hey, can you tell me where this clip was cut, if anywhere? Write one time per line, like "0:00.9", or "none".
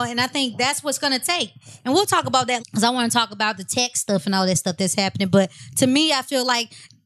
0:02.6